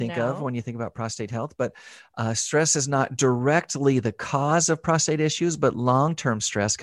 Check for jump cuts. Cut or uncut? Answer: uncut